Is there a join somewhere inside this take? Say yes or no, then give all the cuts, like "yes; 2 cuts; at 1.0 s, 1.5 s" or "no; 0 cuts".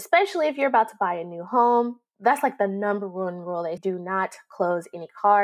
yes; 1 cut; at 3.8 s